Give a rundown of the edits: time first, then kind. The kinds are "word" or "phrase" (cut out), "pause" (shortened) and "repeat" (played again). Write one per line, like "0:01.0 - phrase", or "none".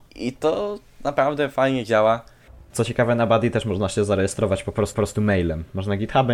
0:04.9 - repeat